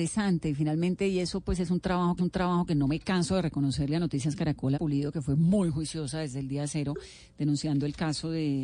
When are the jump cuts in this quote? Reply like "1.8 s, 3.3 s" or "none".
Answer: 2.2 s, 4.7 s